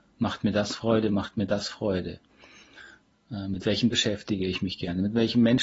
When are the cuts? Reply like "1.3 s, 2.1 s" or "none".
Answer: 3.9 s